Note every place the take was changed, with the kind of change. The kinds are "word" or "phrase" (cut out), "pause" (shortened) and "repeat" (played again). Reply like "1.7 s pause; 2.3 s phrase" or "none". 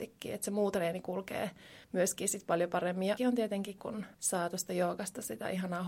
1.8 s pause; 3.2 s word; 3.8 s word; 4.1 s pause